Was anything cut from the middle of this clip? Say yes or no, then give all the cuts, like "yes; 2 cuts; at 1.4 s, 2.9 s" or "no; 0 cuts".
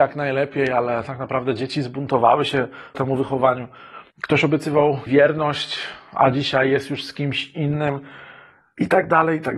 yes; 3 cuts; at 2.9 s, 4.1 s, 5.1 s